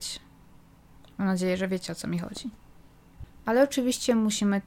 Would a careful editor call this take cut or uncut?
uncut